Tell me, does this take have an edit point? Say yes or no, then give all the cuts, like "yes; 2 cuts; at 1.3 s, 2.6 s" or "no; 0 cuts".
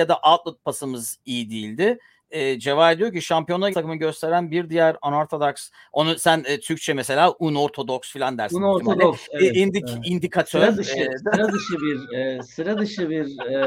yes; 1 cut; at 3.7 s